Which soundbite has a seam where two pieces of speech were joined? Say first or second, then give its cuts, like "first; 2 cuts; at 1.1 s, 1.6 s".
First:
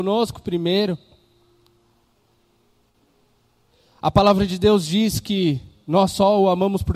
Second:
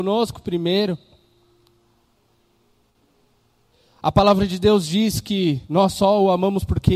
second; 1 cut; at 5.6 s